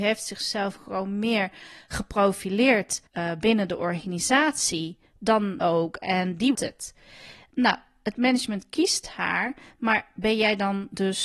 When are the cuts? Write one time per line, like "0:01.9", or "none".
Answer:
0:03.1
0:05.6
0:06.5